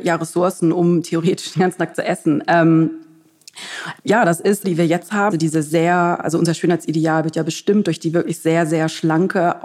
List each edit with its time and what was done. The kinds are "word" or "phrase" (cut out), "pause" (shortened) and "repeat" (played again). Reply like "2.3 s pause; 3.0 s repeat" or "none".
4.0 s pause; 4.6 s phrase; 5.3 s word